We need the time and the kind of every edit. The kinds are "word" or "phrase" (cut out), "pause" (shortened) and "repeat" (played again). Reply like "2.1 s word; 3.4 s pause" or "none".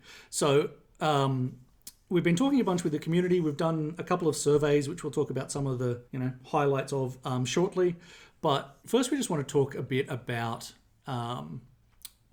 6.1 s pause; 8.8 s pause